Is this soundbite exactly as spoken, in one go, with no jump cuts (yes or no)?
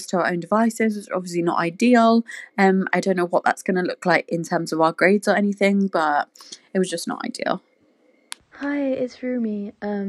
no